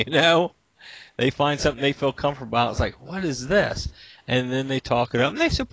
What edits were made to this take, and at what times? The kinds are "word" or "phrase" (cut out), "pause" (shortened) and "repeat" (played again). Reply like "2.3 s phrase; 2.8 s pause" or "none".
none